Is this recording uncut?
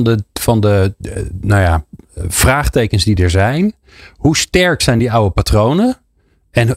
yes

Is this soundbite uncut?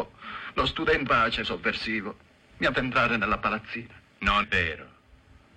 no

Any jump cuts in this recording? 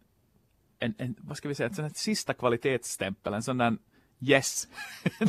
no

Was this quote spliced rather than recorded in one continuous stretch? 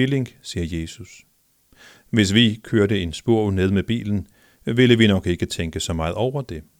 no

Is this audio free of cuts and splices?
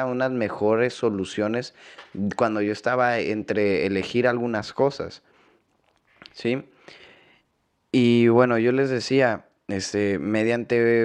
yes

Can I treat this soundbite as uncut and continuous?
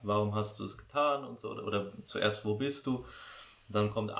yes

